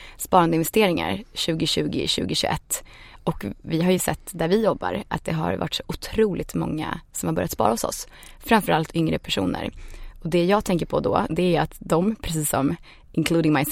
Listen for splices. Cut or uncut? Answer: uncut